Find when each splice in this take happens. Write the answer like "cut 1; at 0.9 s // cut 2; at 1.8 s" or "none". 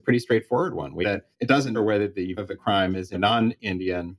cut 1; at 1.0 s // cut 2; at 1.3 s // cut 3; at 1.7 s // cut 4; at 2.4 s // cut 5; at 3.1 s